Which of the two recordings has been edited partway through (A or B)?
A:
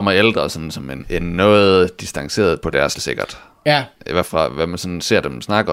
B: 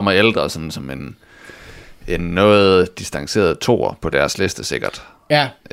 A